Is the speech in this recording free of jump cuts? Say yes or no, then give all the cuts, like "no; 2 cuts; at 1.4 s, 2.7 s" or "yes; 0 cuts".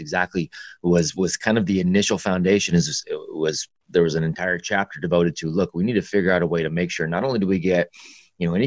yes; 0 cuts